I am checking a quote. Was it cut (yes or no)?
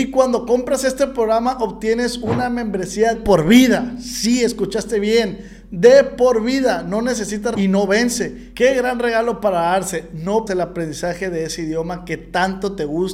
yes